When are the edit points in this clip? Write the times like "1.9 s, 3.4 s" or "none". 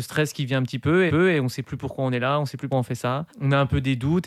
1.1 s, 2.7 s, 3.3 s